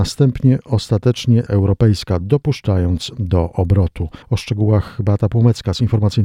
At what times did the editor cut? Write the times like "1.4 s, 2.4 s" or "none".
1.5 s, 4.2 s